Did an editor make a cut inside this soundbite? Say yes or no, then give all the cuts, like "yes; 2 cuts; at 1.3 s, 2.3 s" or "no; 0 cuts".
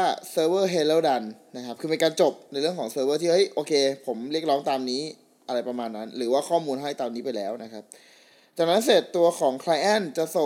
no; 0 cuts